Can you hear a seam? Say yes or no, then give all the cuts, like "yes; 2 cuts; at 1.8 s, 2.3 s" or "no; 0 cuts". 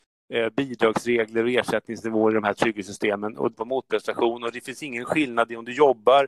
yes; 1 cut; at 3.5 s